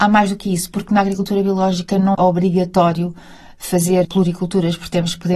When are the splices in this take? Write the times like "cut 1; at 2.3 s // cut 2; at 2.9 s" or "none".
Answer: cut 1; at 2.1 s // cut 2; at 4.0 s